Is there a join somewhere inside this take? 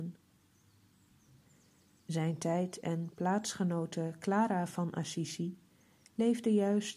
no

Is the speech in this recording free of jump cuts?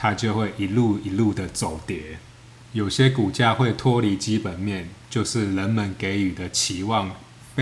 yes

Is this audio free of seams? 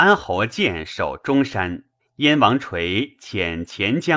no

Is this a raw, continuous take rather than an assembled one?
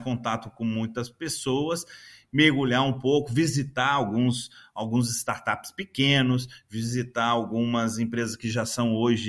yes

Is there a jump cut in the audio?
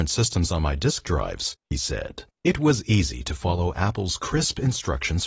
yes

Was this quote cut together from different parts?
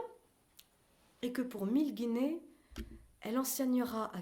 no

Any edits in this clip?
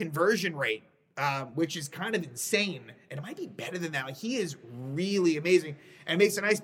no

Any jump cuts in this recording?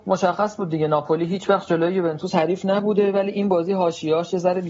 no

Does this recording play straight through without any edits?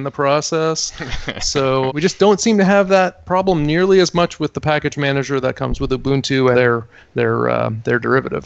no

